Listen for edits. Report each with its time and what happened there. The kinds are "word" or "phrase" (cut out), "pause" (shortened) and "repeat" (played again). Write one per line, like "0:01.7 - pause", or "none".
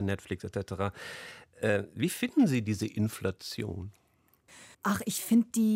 0:04.7 - pause